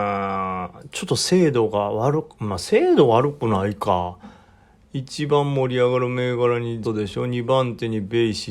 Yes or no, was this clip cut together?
yes